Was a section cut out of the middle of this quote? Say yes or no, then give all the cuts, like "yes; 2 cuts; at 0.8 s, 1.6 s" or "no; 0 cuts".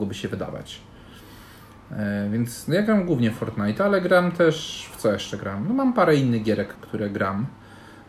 yes; 1 cut; at 6.7 s